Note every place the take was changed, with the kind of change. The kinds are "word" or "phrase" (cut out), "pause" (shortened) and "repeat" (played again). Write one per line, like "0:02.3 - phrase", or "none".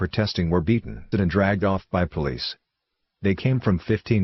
0:01.1 - word